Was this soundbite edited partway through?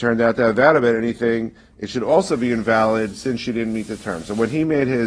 no; 0 cuts

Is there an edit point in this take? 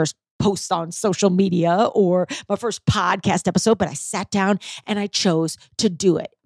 no; 0 cuts

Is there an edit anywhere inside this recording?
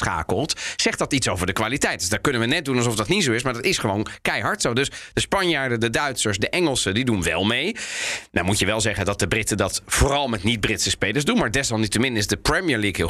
no; 0 cuts

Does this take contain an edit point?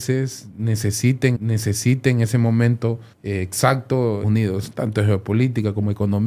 yes; 3 cuts; at 1.3 s, 3.1 s, 4.2 s

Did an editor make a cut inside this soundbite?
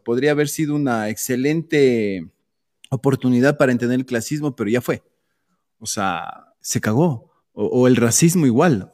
yes; 1 cut; at 7.4 s

